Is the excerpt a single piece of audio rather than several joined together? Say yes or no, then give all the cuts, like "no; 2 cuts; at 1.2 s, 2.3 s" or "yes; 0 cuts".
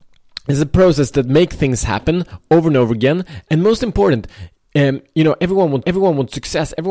no; 1 cut; at 5.8 s